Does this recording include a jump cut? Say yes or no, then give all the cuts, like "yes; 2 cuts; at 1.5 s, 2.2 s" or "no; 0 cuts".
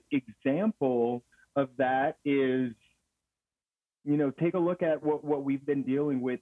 no; 0 cuts